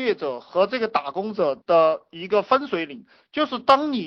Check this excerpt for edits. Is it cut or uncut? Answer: uncut